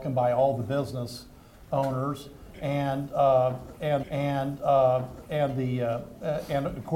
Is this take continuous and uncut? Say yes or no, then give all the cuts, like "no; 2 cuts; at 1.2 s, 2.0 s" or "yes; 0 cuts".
no; 1 cut; at 4.0 s